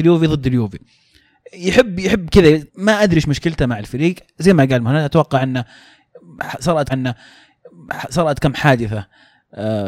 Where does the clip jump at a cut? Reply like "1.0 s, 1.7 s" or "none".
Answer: 2.7 s, 6.9 s